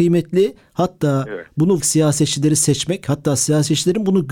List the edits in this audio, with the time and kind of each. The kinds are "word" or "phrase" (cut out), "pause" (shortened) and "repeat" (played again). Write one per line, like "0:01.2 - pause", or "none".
0:01.8 - phrase